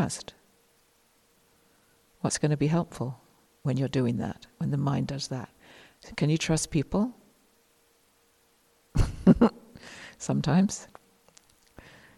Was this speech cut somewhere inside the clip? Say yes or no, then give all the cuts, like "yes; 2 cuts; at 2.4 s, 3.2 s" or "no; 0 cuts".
no; 0 cuts